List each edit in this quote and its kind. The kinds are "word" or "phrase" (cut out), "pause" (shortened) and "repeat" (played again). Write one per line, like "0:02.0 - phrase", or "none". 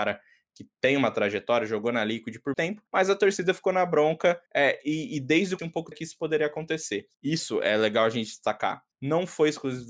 0:02.5 - word
0:02.9 - pause
0:04.5 - pause
0:05.6 - phrase
0:05.9 - word
0:07.1 - pause
0:08.9 - pause

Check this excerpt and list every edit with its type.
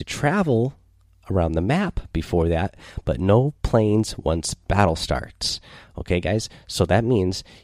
none

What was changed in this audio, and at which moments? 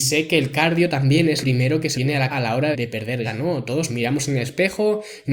0:01.4 - word
0:01.9 - word
0:02.3 - word
0:02.7 - word
0:03.2 - word
0:03.9 - word

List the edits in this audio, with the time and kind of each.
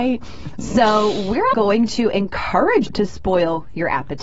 0:01.5 - word
0:02.9 - word

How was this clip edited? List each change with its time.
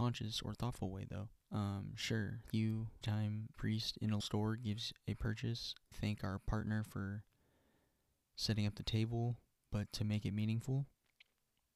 0:01.4 - pause
0:02.5 - word
0:03.0 - word
0:03.5 - word
0:04.2 - word
0:05.9 - phrase

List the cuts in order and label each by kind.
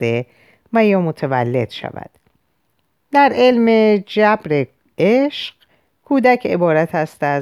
none

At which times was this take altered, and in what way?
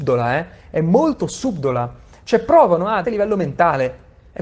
0:03.0 - word

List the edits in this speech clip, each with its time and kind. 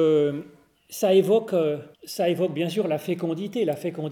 0:01.9 - pause

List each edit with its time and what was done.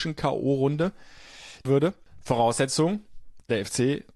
0:01.6 - phrase

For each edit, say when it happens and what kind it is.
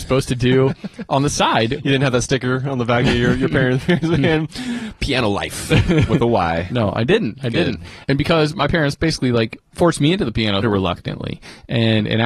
0:10.6 - phrase

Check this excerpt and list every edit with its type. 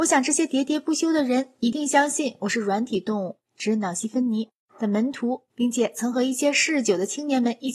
0:03.5 - pause
0:05.5 - pause

